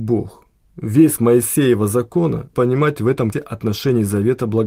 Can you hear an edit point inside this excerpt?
yes; 3 cuts; at 1.2 s, 2.5 s, 3.3 s

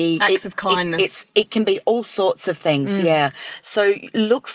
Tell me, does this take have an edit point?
no; 0 cuts

